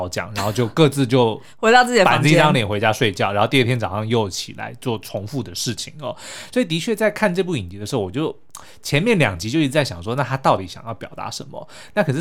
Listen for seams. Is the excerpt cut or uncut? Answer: uncut